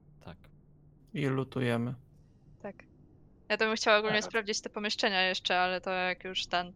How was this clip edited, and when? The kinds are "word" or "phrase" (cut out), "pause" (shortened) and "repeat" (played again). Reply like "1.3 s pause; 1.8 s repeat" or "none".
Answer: none